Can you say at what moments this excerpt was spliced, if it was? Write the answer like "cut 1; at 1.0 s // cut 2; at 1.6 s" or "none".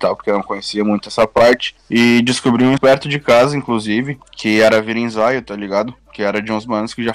cut 1; at 2.8 s // cut 2; at 4.2 s